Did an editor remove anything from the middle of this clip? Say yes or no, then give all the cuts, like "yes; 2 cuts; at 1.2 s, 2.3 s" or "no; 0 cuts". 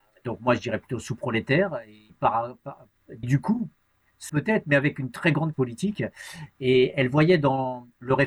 yes; 4 cuts; at 2.1 s, 3.2 s, 4.3 s, 5.5 s